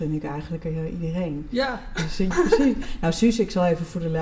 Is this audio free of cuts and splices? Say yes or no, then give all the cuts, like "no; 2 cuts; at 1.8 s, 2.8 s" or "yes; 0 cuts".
no; 1 cut; at 2.3 s